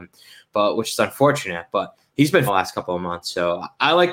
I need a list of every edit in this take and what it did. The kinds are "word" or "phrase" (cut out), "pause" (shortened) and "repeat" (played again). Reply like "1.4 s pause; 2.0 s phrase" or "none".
2.5 s word